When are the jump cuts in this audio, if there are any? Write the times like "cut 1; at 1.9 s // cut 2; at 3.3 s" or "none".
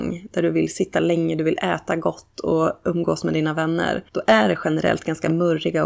cut 1; at 4.1 s